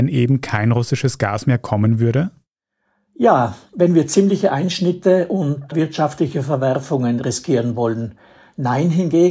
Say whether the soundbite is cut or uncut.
uncut